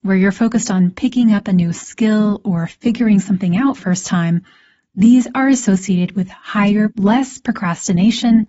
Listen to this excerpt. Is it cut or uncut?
cut